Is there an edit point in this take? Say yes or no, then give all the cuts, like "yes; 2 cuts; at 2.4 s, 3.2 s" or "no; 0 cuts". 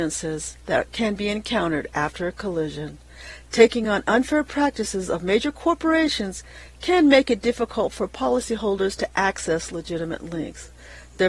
no; 0 cuts